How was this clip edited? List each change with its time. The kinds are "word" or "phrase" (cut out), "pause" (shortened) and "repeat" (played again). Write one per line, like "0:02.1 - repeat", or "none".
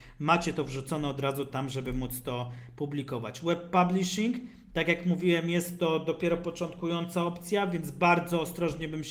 none